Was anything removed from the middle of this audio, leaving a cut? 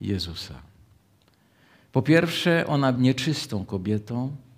yes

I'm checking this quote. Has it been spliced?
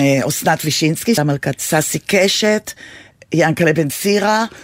yes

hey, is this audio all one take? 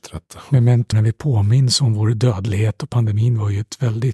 no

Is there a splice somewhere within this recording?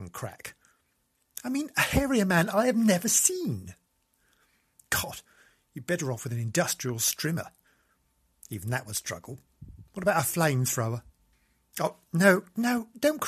no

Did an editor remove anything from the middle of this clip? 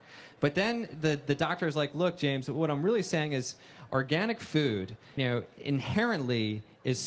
yes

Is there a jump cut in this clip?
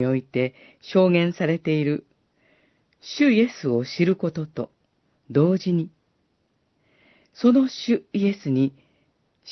no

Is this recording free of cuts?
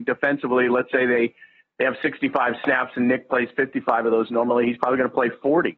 yes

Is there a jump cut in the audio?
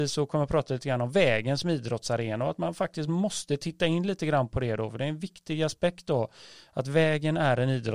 no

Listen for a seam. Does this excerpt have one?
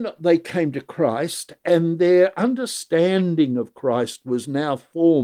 no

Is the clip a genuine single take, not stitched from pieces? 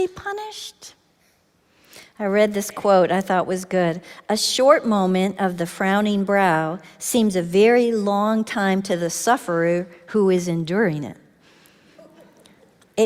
yes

